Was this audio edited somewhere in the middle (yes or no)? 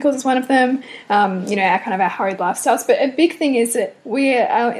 no